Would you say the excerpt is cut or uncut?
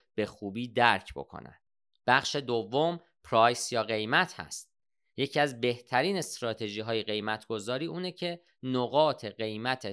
uncut